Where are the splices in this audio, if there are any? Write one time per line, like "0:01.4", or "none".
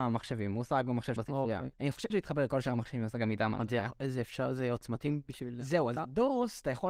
0:01.2
0:01.7
0:02.1